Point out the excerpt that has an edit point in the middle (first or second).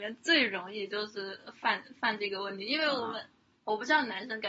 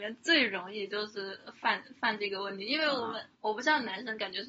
second